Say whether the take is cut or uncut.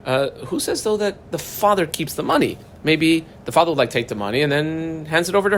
uncut